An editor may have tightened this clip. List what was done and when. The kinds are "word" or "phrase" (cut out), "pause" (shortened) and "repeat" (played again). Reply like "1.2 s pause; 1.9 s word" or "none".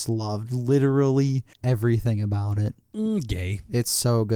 1.5 s pause; 2.8 s pause

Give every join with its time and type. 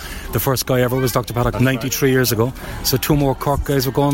1.5 s word

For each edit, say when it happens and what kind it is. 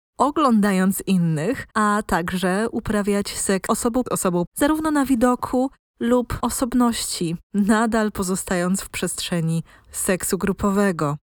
1.7 s pause; 3.7 s word; 4.1 s phrase; 4.5 s word; 6.4 s word

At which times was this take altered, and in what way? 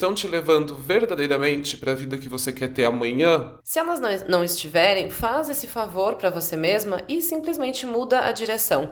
3.6 s pause

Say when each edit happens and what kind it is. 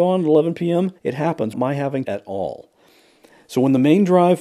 1.0 s pause; 1.5 s word; 2.0 s phrase

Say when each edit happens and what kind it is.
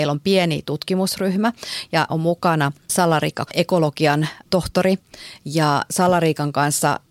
2.1 s word; 3.5 s word; 5.9 s word

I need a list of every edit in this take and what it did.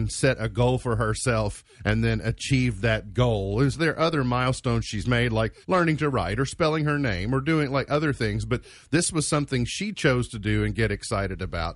1.7 s pause; 5.6 s pause

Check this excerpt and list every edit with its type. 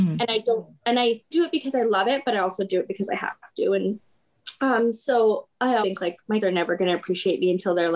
1.3 s word; 5.8 s word; 6.4 s word

